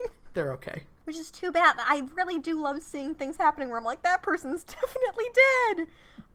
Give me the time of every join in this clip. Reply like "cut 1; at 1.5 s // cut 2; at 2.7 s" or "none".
none